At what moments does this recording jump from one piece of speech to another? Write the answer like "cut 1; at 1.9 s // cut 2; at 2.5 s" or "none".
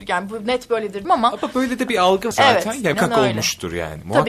cut 1; at 1.0 s // cut 2; at 2.3 s // cut 3; at 2.9 s